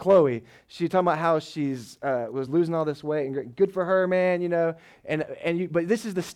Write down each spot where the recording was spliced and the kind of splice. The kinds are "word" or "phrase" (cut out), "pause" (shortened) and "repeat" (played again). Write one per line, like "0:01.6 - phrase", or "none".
none